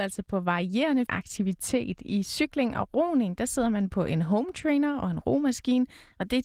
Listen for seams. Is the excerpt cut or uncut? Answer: cut